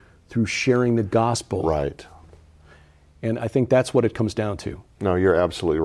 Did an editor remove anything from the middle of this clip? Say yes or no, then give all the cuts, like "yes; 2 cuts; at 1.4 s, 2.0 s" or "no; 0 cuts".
no; 0 cuts